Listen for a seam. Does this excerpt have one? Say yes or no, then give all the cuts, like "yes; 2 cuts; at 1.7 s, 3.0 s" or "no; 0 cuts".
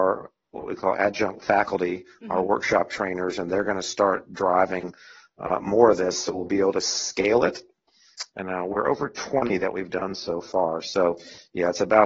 no; 0 cuts